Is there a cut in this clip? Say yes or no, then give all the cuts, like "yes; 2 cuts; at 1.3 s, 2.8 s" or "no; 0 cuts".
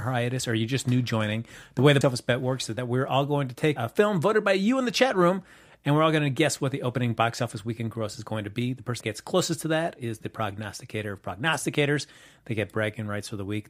yes; 3 cuts; at 2.0 s, 3.8 s, 9.0 s